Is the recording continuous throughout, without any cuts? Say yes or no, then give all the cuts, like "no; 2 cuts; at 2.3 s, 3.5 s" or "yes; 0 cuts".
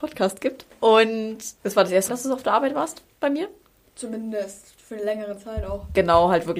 no; 1 cut; at 2.1 s